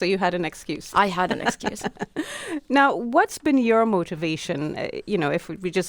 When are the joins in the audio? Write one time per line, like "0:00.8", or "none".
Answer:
none